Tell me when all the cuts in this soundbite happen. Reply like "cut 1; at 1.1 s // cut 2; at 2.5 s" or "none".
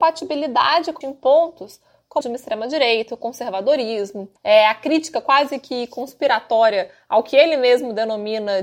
cut 1; at 1.0 s // cut 2; at 2.2 s // cut 3; at 4.4 s